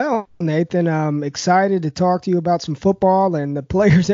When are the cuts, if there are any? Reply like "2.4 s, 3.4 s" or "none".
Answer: none